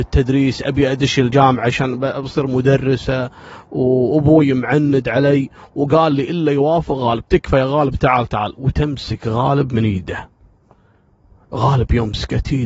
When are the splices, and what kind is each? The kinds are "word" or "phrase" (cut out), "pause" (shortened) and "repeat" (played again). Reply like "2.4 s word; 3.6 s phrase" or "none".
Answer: none